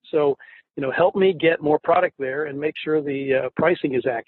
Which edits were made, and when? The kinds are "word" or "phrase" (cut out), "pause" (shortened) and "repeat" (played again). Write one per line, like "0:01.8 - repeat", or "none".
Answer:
none